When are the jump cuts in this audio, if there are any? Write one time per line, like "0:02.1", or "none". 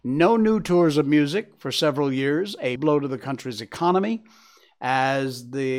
0:02.8